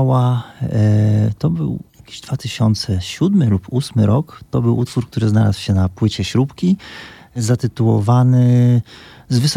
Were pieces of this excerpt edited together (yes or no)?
yes